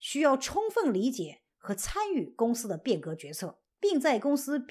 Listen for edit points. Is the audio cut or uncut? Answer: cut